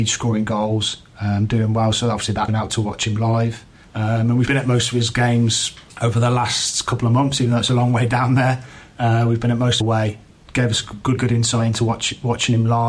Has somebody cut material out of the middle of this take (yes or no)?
yes